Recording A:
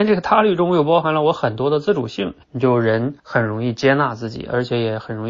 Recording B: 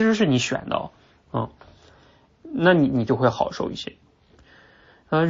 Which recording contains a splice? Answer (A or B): A